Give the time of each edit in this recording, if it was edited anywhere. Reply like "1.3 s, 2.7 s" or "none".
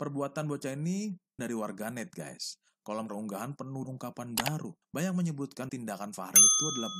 1.4 s, 3.1 s, 3.8 s, 4.8 s, 5.7 s